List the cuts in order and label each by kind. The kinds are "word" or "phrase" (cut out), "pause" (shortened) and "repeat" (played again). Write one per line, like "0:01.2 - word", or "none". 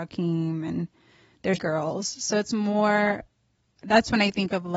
0:01.6 - word